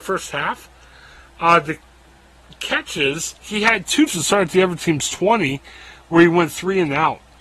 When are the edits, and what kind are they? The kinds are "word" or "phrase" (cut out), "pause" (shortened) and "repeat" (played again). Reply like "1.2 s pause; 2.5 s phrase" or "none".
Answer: 3.4 s pause; 4.1 s word